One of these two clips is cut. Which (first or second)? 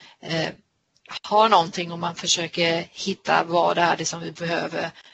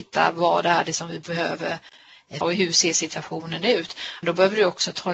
second